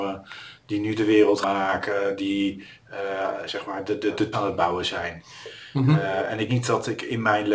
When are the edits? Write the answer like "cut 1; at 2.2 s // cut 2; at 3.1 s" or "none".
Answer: cut 1; at 1.4 s // cut 2; at 3.5 s // cut 3; at 4.3 s // cut 4; at 6.5 s